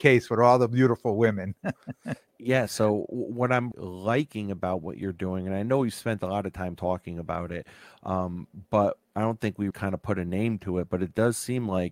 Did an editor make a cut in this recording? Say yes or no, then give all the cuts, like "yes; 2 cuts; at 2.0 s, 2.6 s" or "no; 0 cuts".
yes; 3 cuts; at 2.3 s, 3.7 s, 9.7 s